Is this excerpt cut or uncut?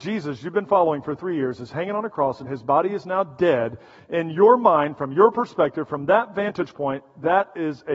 uncut